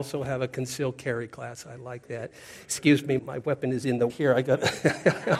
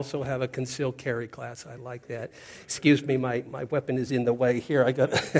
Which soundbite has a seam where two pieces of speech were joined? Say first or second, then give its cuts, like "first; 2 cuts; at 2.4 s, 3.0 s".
first; 2 cuts; at 3.2 s, 4.1 s